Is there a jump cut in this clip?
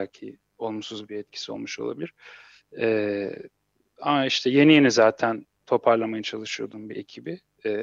no; 0 cuts

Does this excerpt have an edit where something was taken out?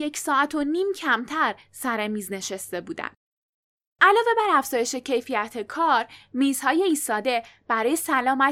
no; 0 cuts

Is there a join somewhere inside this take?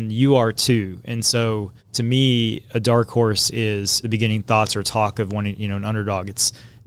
yes; 2 cuts; at 1.8 s, 4.0 s

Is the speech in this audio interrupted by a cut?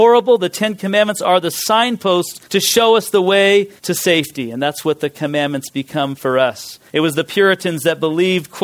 yes; 3 cuts; at 2.4 s, 3.8 s, 6.9 s

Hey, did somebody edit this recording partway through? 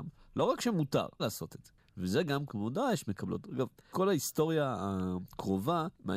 yes; 3 cuts; at 1.2 s, 2.5 s, 3.9 s

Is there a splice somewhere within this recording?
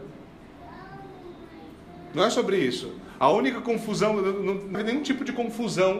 yes; 1 cut; at 4.7 s

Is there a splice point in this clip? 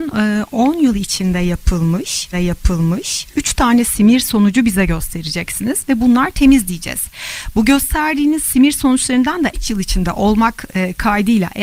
yes; 2 cuts; at 2.3 s, 9.5 s

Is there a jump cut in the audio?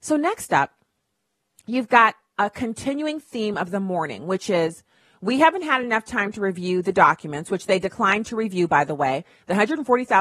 no; 0 cuts

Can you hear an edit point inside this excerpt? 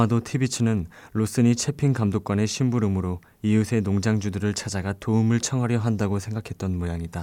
no; 0 cuts

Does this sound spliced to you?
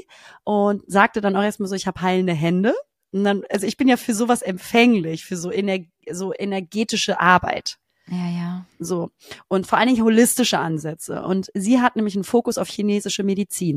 no; 0 cuts

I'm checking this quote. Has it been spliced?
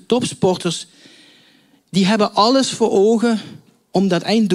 no; 0 cuts

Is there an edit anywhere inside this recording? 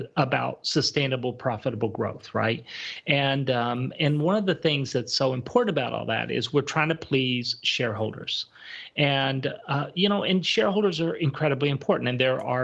no; 0 cuts

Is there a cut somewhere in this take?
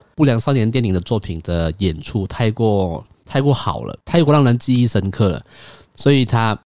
no; 0 cuts

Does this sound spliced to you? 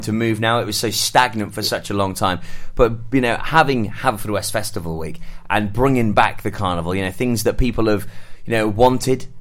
no; 0 cuts

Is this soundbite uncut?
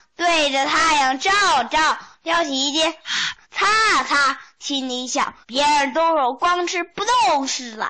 no; 2 cuts; at 3.4 s, 5.4 s

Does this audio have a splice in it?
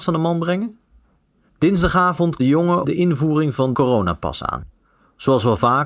yes; 2 cuts; at 2.4 s, 3.7 s

